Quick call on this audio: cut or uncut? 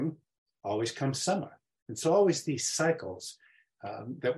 cut